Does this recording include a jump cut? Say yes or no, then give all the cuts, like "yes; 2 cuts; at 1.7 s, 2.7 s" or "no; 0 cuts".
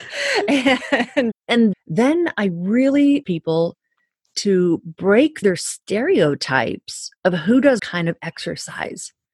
yes; 6 cuts; at 1.3 s, 1.7 s, 3.2 s, 5.4 s, 7.2 s, 7.8 s